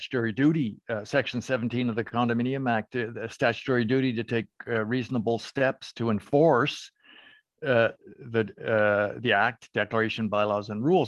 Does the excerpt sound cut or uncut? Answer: uncut